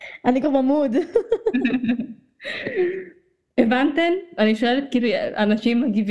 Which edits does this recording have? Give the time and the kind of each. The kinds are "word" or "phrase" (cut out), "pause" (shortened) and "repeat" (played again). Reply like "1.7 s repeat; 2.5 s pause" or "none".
none